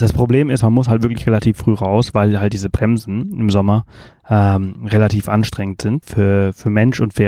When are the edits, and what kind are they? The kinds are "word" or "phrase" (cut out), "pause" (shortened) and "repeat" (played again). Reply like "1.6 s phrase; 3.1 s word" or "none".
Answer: 6.0 s word